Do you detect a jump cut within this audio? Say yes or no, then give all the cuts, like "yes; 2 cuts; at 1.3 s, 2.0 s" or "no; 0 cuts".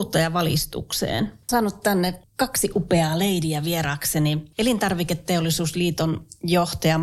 yes; 1 cut; at 1.5 s